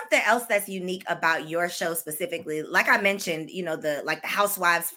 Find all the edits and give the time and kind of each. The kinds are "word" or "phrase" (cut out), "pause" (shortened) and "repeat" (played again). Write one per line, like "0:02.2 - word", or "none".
none